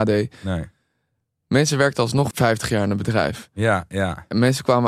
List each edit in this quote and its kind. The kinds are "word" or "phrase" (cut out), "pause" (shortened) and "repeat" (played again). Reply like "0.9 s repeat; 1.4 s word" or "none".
2.3 s word